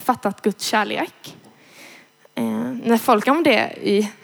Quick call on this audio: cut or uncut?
cut